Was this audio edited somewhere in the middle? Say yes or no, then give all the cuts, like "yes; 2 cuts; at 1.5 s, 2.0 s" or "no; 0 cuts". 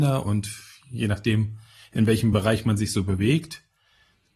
no; 0 cuts